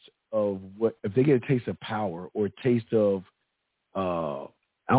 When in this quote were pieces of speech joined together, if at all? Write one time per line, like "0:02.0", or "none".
none